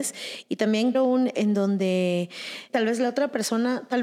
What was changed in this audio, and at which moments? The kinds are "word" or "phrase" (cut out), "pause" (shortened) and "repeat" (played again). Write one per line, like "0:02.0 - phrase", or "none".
0:00.9 - word
0:01.3 - word
0:02.7 - word